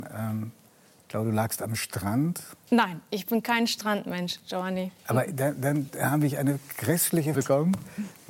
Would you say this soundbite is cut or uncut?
cut